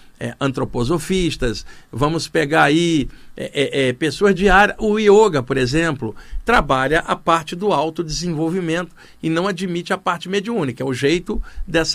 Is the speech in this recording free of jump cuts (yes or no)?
yes